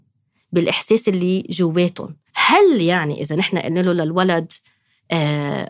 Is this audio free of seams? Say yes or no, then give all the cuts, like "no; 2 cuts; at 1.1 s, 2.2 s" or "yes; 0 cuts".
no; 1 cut; at 2.3 s